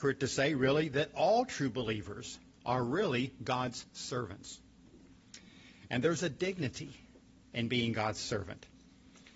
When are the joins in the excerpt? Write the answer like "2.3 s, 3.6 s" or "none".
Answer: none